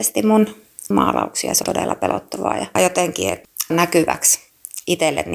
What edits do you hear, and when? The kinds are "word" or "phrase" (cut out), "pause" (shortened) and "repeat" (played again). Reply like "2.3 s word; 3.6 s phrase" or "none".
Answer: 0.9 s word; 1.6 s phrase; 2.8 s word; 3.7 s word